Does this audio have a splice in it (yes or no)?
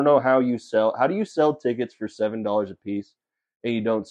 no